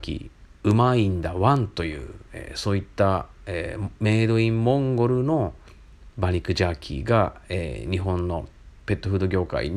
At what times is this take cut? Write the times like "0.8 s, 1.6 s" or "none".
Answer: 6.1 s, 8.8 s